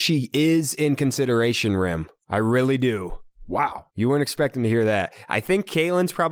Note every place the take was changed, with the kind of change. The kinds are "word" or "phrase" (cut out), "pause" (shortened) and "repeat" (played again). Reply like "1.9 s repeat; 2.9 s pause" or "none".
2.2 s pause; 3.9 s pause